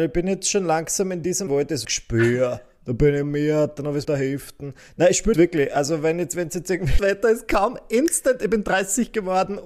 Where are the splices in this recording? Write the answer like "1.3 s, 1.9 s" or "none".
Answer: 1.5 s, 1.8 s, 3.2 s, 4.0 s, 5.3 s, 7.0 s